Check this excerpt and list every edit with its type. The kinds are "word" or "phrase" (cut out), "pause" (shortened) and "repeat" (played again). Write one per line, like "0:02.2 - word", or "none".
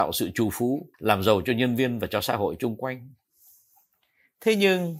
0:00.9 - pause